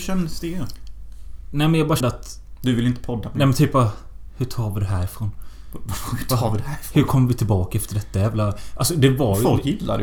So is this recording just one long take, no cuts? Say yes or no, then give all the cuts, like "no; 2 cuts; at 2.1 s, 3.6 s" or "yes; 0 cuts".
no; 1 cut; at 2.0 s